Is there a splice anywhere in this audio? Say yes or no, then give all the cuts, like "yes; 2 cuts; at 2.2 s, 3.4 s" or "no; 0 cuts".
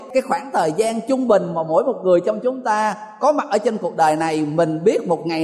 no; 0 cuts